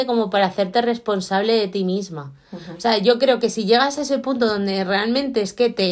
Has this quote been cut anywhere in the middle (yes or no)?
no